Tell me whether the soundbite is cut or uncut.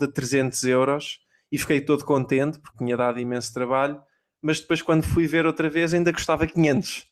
cut